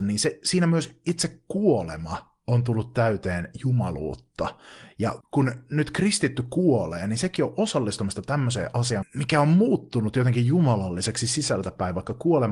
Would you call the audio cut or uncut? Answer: cut